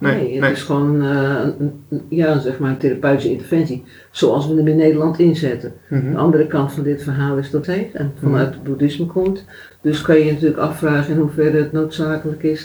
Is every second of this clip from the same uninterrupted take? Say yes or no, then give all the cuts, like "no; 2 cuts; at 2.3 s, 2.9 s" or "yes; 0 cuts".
no; 1 cut; at 7.6 s